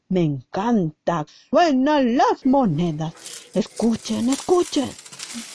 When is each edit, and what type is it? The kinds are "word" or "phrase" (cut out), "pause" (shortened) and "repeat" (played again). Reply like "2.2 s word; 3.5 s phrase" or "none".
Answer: 1.3 s word